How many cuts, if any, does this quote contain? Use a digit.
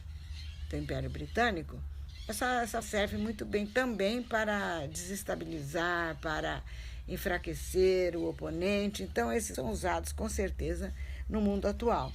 2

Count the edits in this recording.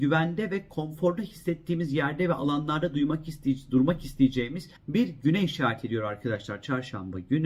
1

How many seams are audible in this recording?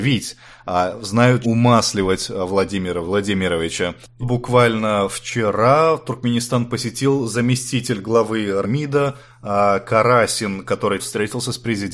4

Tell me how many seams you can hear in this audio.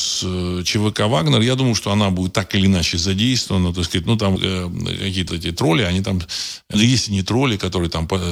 3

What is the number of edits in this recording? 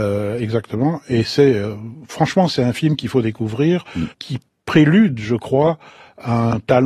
1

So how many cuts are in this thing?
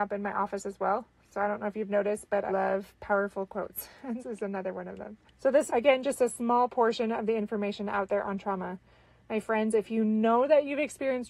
4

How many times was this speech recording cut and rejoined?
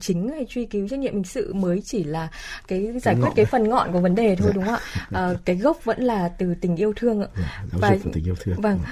0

